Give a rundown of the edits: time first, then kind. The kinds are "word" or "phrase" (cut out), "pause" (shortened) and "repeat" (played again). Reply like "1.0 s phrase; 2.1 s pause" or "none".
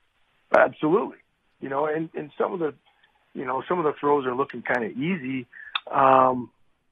none